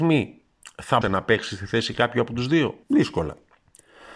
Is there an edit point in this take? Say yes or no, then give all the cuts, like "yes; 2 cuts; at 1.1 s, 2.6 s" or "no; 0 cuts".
yes; 2 cuts; at 1.0 s, 2.8 s